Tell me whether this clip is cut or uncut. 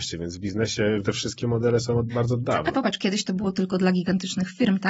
cut